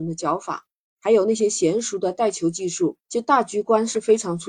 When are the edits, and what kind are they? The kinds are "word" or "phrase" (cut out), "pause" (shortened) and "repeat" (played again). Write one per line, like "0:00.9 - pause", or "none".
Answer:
0:03.0 - pause